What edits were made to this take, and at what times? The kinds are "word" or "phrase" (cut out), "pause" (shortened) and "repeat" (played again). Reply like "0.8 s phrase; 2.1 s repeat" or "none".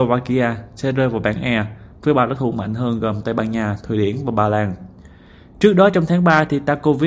none